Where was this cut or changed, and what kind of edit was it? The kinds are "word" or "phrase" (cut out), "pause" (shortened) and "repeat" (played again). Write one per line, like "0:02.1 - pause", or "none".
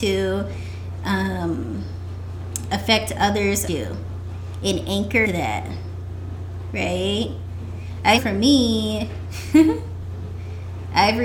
0:03.7 - word
0:05.2 - word
0:08.2 - word